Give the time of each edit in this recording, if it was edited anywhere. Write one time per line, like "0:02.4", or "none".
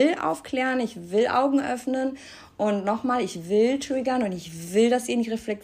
none